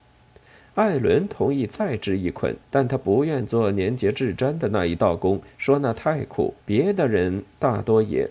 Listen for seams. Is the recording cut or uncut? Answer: cut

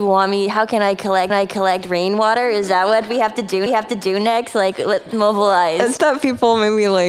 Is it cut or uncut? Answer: cut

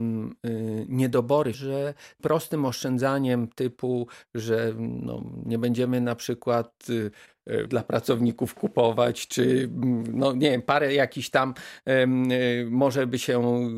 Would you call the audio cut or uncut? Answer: cut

